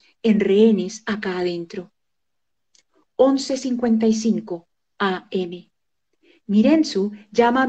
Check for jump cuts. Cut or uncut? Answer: uncut